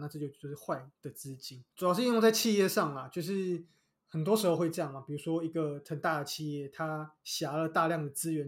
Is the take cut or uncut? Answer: uncut